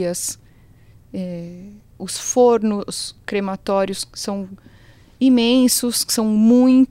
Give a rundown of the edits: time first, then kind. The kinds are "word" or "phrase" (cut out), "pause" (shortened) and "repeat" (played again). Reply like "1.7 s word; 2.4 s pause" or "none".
none